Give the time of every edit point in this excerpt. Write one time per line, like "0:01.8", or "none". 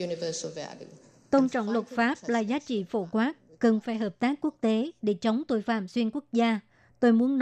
none